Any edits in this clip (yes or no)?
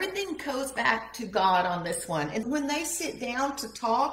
yes